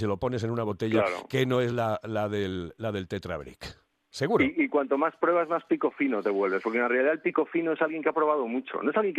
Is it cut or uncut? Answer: uncut